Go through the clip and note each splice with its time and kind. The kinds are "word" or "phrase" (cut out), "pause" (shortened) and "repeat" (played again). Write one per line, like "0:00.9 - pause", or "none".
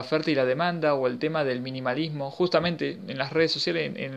none